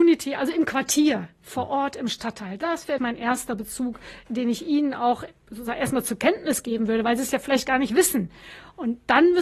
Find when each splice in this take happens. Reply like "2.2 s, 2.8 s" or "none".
3.0 s